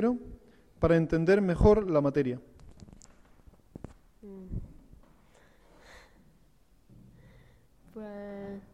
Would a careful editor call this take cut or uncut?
uncut